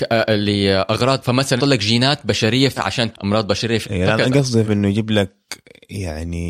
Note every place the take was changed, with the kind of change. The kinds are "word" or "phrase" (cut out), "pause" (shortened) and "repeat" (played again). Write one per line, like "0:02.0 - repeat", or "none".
0:01.2 - word
0:01.6 - word
0:02.8 - word
0:03.1 - word
0:03.8 - word
0:04.6 - word